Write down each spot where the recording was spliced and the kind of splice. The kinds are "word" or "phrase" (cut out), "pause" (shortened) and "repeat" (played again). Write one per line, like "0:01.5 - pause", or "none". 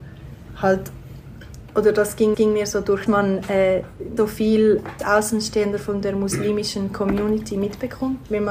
0:02.3 - repeat
0:03.1 - phrase
0:04.2 - word
0:05.0 - word